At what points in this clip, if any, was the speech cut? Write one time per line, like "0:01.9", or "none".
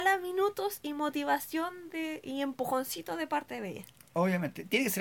none